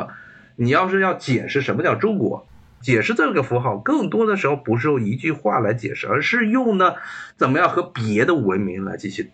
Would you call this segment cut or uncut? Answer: uncut